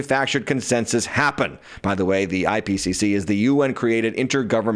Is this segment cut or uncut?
uncut